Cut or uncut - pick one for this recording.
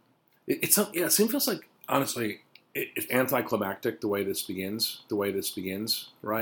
cut